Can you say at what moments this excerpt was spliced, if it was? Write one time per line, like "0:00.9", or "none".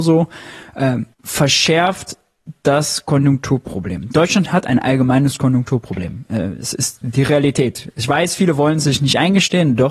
0:01.1